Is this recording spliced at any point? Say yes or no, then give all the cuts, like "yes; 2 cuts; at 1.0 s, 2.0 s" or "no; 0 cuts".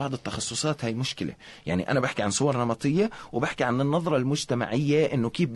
no; 0 cuts